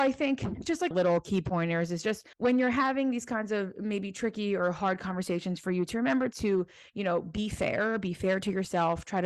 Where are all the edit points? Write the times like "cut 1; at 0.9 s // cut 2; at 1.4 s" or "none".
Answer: cut 1; at 0.9 s // cut 2; at 2.3 s